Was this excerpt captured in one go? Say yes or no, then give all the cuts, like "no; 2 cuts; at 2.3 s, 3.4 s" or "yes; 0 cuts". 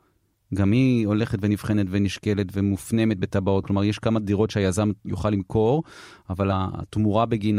yes; 0 cuts